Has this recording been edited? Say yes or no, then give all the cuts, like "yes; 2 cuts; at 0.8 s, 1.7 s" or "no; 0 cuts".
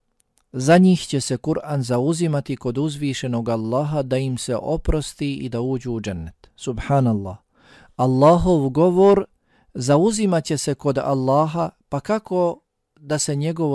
no; 0 cuts